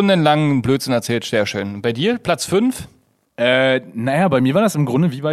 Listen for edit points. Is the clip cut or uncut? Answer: uncut